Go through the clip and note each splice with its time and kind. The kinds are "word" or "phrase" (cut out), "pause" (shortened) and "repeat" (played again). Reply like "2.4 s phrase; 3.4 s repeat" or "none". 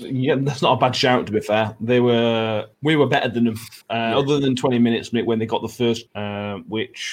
2.7 s pause; 3.8 s pause; 6.1 s word